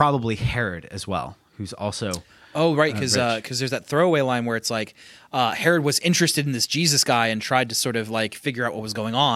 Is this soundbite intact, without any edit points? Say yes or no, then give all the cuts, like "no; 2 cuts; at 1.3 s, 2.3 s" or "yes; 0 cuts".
yes; 0 cuts